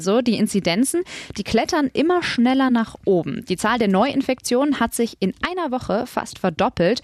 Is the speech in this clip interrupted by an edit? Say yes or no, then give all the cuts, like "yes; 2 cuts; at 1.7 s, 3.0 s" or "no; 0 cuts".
no; 0 cuts